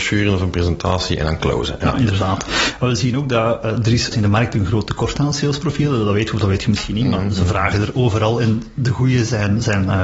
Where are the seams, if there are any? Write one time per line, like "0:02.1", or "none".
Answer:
0:04.1